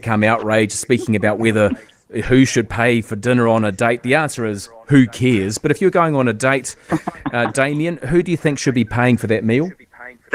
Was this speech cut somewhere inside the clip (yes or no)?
no